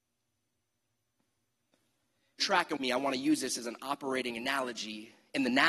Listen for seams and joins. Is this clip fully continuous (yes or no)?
no